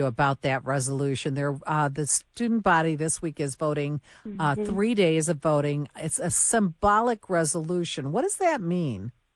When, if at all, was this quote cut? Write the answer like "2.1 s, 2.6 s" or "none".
none

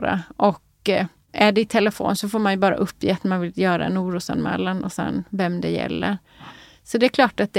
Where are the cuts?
none

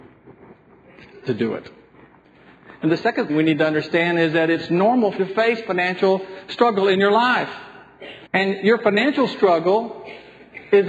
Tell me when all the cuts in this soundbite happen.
3.3 s, 5.2 s, 8.3 s

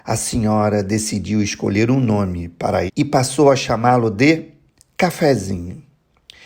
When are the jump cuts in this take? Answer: 2.9 s, 4.8 s

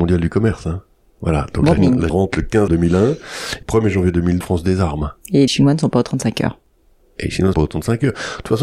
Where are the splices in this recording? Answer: 1.8 s, 2.1 s, 2.7 s, 3.6 s, 4.4 s, 5.5 s, 7.5 s

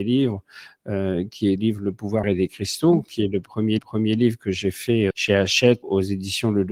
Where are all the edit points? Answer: 1.6 s, 2.2 s, 3.8 s, 5.1 s, 5.8 s

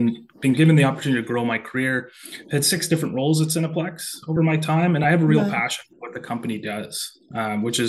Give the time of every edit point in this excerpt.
none

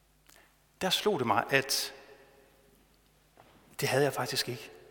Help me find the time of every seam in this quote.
none

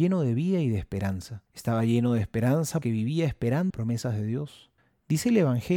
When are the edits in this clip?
1.5 s, 2.8 s, 3.7 s, 4.8 s

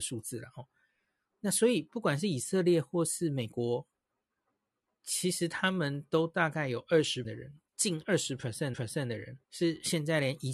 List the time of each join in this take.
7.2 s, 7.7 s, 8.7 s, 9.4 s

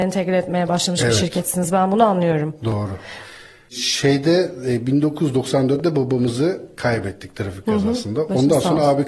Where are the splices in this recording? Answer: none

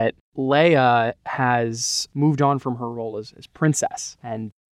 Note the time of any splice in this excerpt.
none

